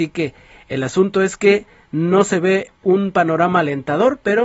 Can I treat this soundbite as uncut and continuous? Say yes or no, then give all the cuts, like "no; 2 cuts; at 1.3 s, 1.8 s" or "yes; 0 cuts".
yes; 0 cuts